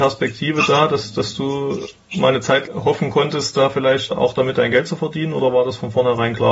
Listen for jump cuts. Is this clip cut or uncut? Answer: cut